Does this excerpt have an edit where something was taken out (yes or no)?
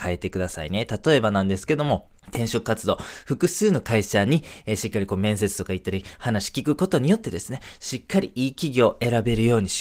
yes